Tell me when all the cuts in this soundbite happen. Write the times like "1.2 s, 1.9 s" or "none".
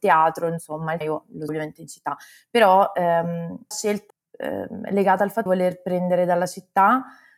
1.0 s, 1.5 s, 3.7 s, 4.1 s, 5.5 s